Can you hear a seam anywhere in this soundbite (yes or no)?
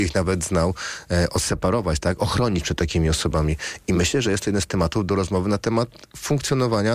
no